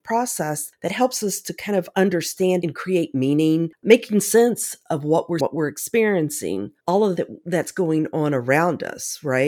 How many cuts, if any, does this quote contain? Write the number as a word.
four